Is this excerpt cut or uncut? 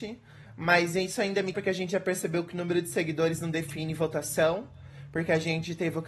cut